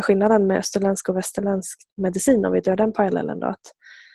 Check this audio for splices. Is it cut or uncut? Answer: uncut